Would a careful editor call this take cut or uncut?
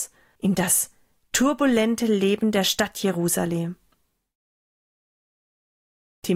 uncut